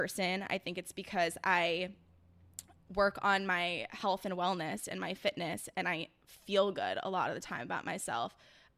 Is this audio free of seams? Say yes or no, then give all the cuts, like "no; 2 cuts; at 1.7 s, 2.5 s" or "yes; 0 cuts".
yes; 0 cuts